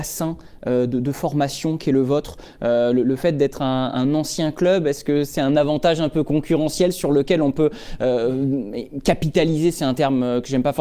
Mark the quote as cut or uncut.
uncut